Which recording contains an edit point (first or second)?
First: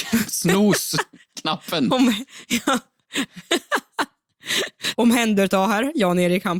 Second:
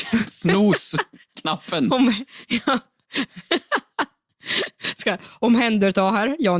first